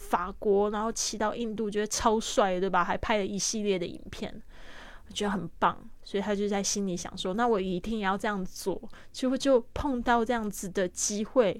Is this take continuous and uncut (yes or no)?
yes